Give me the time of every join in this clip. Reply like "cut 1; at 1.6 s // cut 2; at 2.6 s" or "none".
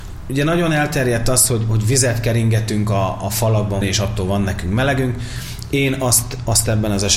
cut 1; at 3.8 s

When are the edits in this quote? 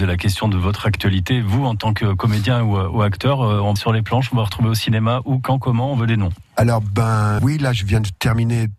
cut 1; at 3.8 s // cut 2; at 7.4 s

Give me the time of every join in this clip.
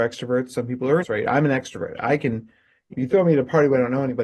cut 1; at 1.0 s // cut 2; at 2.9 s

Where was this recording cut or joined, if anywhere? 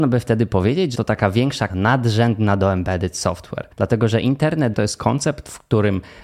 cut 1; at 0.9 s // cut 2; at 1.7 s // cut 3; at 3.7 s // cut 4; at 4.7 s

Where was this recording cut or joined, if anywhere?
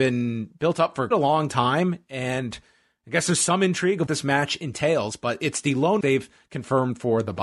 cut 1; at 1.1 s // cut 2; at 4.1 s // cut 3; at 6.0 s

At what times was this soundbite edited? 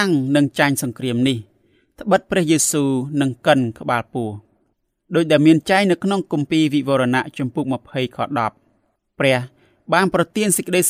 none

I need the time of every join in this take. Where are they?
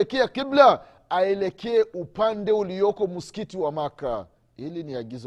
none

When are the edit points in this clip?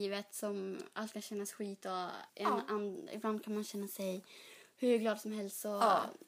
cut 1; at 2.3 s

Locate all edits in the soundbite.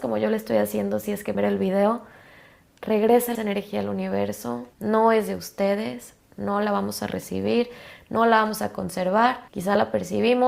cut 1; at 1.3 s // cut 2; at 3.3 s // cut 3; at 4.7 s // cut 4; at 9.5 s

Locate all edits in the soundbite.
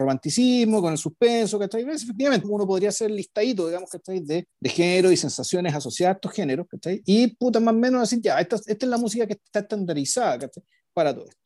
cut 1; at 2.4 s // cut 2; at 4.5 s

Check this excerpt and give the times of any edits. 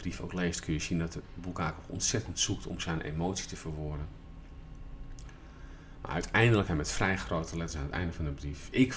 cut 1; at 6.7 s

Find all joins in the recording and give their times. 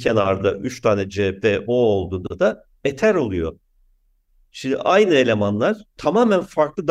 none

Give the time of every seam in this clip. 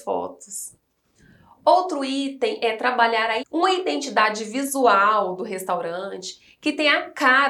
cut 1; at 3.4 s

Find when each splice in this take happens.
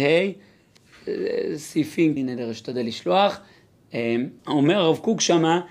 cut 1; at 2.2 s // cut 2; at 4.4 s

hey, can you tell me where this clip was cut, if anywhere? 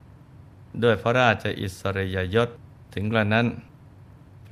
cut 1; at 2.8 s

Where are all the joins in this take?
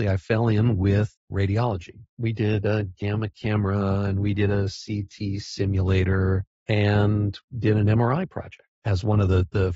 cut 1; at 2.1 s // cut 2; at 7.5 s // cut 3; at 8.7 s

